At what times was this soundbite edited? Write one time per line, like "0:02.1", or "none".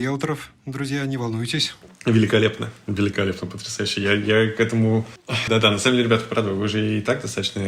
0:01.9
0:05.5